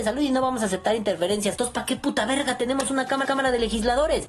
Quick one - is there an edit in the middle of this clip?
yes; 1 cut; at 3.2 s

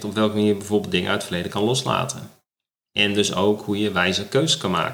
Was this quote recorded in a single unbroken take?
yes; 0 cuts

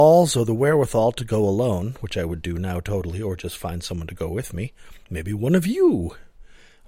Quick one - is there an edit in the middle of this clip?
yes; 1 cut; at 5.0 s

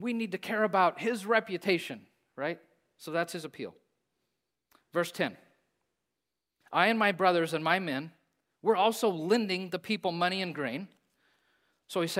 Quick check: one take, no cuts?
yes; 0 cuts

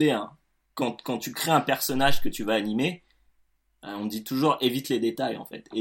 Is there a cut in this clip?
no; 0 cuts

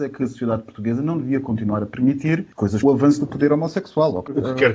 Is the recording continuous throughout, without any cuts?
no; 1 cut; at 2.8 s

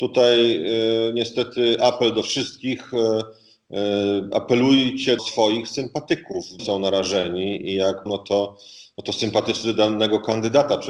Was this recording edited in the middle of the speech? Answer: yes; 3 cuts; at 5.2 s, 6.6 s, 8.1 s

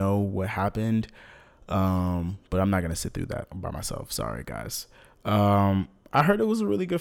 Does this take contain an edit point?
no; 0 cuts

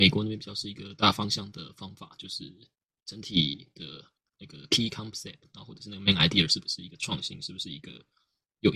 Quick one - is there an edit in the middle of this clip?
no; 0 cuts

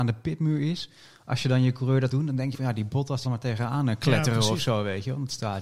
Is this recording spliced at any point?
yes; 3 cuts; at 2.1 s, 2.5 s, 3.2 s

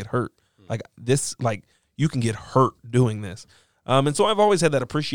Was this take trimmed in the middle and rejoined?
no; 0 cuts

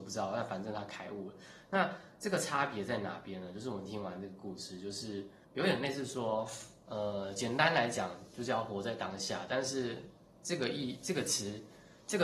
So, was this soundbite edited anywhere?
yes; 1 cut; at 5.4 s

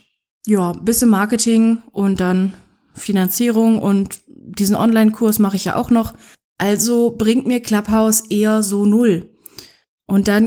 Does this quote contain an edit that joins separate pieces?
no; 0 cuts

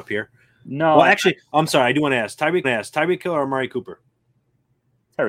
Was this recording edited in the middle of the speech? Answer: yes; 1 cut; at 2.6 s

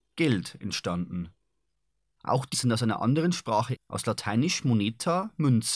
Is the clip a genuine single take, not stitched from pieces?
no; 2 cuts; at 2.5 s, 3.8 s

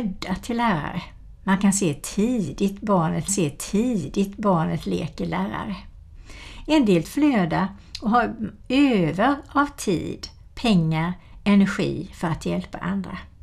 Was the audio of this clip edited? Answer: yes; 2 cuts; at 3.3 s, 7.0 s

